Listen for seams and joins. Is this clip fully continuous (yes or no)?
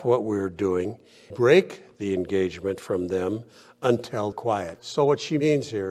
no